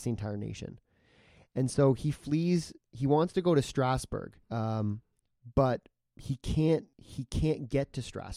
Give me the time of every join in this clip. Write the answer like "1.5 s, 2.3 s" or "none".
4.4 s, 6.1 s, 6.9 s